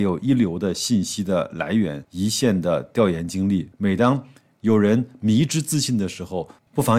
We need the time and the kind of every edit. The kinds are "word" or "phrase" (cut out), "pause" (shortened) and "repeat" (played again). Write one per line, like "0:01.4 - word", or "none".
0:03.7 - pause